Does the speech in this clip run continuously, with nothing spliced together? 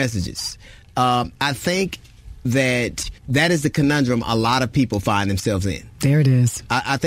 no; 2 cuts; at 1.3 s, 3.2 s

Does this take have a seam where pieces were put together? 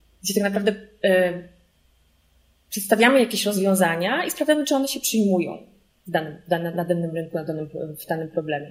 no; 0 cuts

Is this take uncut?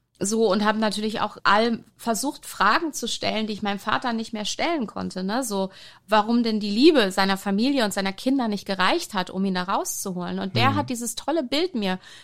no; 1 cut; at 1.4 s

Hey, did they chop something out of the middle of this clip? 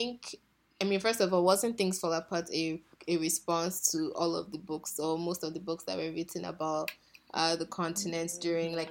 no; 0 cuts

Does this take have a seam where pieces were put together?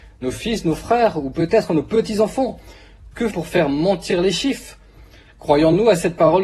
yes; 1 cut; at 3.3 s

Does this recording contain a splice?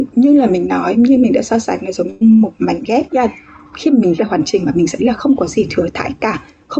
yes; 3 cuts; at 3.1 s, 4.2 s, 5.0 s

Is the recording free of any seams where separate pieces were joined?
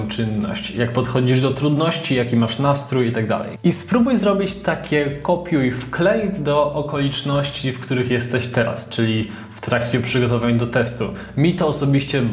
yes; 0 cuts

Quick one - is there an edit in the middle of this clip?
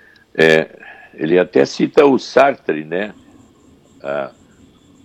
no; 0 cuts

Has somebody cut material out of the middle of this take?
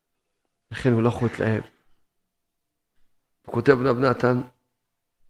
no; 0 cuts

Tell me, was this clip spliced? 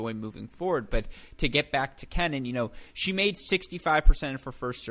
no; 0 cuts

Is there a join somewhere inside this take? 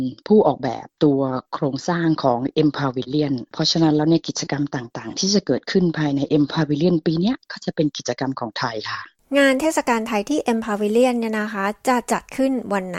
no; 0 cuts

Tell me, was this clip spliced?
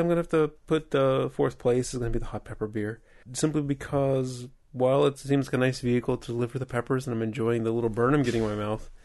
yes; 1 cut; at 3.2 s

